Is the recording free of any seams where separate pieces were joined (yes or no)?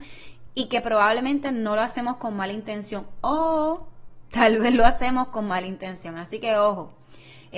yes